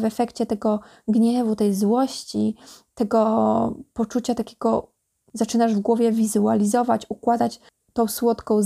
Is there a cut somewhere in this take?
yes; 1 cut; at 5.1 s

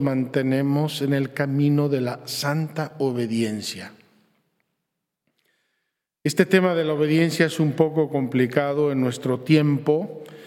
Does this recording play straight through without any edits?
yes; 0 cuts

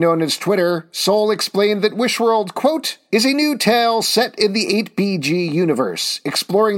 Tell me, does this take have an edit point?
no; 0 cuts

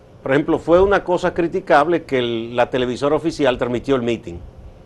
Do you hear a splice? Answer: no; 0 cuts

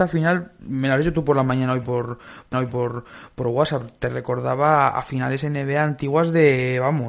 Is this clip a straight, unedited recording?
no; 1 cut; at 2.5 s

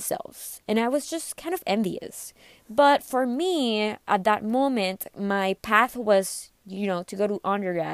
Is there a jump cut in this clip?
no; 0 cuts

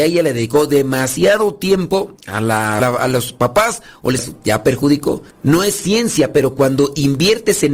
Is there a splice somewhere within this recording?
yes; 4 cuts; at 2.2 s, 2.8 s, 4.2 s, 5.3 s

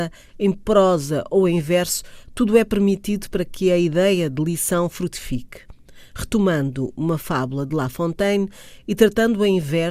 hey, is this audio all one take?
yes; 0 cuts

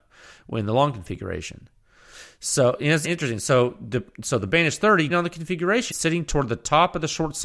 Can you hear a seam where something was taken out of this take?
yes; 3 cuts; at 3.0 s, 5.1 s, 5.9 s

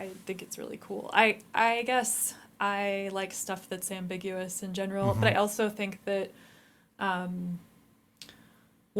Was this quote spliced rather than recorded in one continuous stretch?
no; 0 cuts

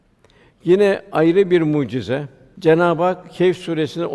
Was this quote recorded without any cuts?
yes; 0 cuts

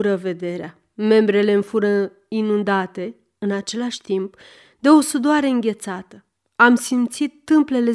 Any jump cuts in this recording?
no; 0 cuts

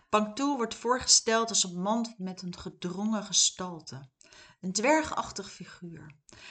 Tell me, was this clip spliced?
no; 0 cuts

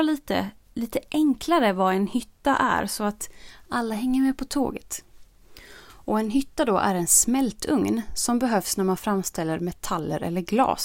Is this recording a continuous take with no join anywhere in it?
yes; 0 cuts

